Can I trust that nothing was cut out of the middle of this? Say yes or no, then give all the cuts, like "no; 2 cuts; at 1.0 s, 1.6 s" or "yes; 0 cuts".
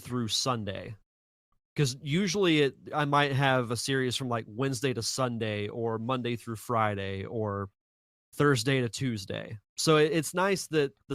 no; 1 cut; at 9.7 s